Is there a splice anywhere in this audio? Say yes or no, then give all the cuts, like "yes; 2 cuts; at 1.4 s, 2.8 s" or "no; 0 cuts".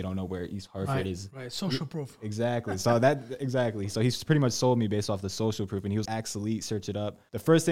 yes; 1 cut; at 6.0 s